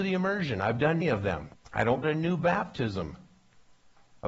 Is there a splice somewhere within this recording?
yes; 3 cuts; at 1.0 s, 1.5 s, 2.0 s

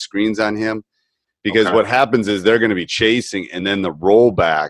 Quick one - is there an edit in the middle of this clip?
no; 0 cuts

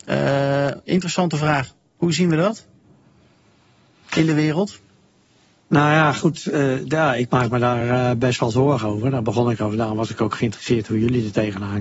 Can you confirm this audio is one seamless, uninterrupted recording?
yes; 0 cuts

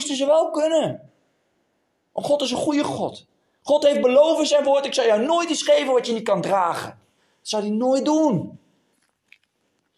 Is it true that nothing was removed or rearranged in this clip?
yes; 0 cuts

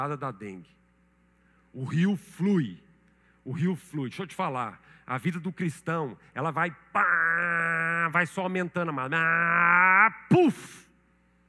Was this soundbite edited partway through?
no; 0 cuts

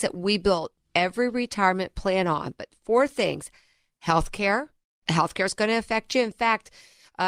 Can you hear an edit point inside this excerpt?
no; 0 cuts

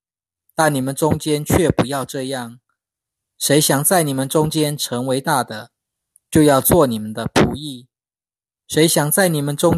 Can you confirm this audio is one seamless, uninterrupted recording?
yes; 0 cuts

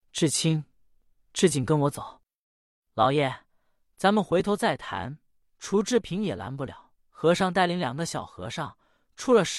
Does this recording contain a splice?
yes; 1 cut; at 7.0 s

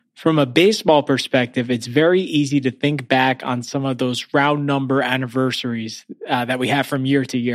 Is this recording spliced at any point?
no; 0 cuts

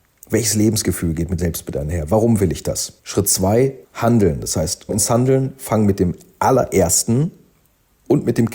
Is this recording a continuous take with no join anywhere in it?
no; 4 cuts; at 1.4 s, 3.0 s, 3.8 s, 4.9 s

